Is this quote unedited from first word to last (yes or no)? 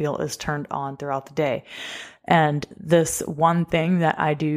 yes